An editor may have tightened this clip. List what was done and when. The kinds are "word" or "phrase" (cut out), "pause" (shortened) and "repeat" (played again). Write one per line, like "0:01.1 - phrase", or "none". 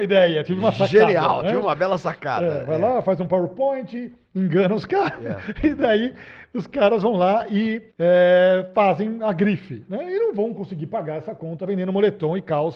0:07.9 - pause

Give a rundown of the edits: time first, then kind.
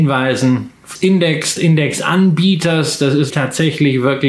0:01.0 - word
0:01.6 - word
0:03.3 - word

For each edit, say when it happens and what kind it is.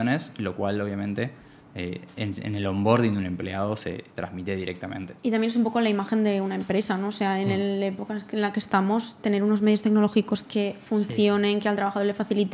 none

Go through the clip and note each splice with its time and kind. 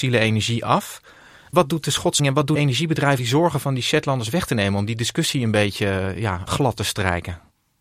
0:02.2 - word
0:02.6 - word
0:03.2 - word
0:06.5 - word

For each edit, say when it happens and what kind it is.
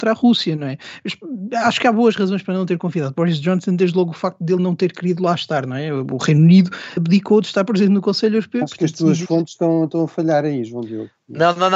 0:07.0 - word

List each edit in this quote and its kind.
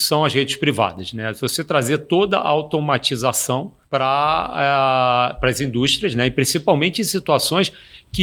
0:03.8 - pause

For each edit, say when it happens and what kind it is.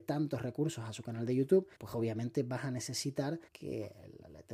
0:01.7 - pause
0:03.5 - pause

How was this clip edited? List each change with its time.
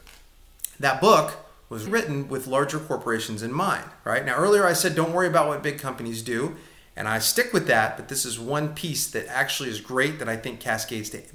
0:01.9 - word

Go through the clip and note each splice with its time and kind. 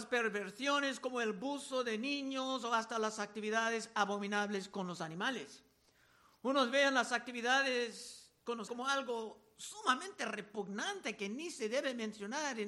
0:08.7 - word

